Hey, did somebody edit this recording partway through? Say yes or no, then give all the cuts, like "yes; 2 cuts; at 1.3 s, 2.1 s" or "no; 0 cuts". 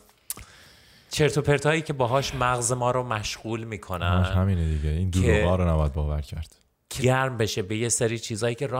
yes; 1 cut; at 7.0 s